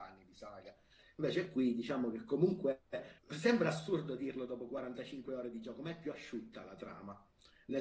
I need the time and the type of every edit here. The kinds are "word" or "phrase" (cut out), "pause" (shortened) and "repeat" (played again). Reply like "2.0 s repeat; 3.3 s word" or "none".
3.2 s pause